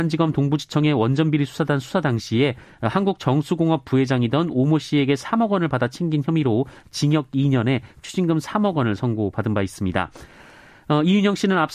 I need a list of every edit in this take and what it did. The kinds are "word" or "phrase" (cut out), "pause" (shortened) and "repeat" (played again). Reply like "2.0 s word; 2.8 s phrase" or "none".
none